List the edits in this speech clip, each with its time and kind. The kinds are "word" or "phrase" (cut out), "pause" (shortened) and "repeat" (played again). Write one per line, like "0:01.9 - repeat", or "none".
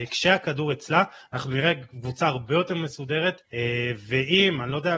0:03.4 - pause